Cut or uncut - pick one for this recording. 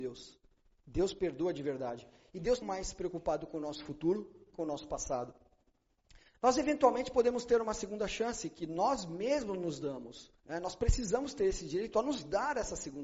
cut